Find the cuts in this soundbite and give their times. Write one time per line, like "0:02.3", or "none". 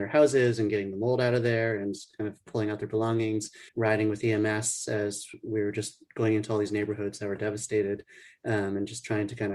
0:03.7

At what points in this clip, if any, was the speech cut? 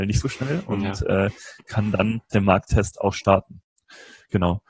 0:02.3

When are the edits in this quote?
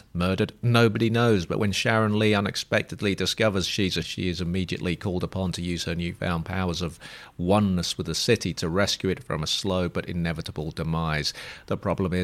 0:04.0

